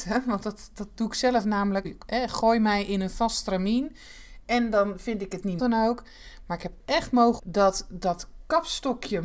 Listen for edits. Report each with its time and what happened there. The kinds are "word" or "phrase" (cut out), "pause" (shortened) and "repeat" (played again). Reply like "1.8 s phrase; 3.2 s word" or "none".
1.8 s word; 5.6 s phrase; 6.8 s word; 7.4 s word